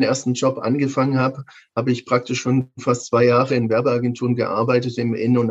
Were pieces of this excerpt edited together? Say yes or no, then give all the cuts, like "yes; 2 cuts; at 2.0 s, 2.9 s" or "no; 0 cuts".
no; 0 cuts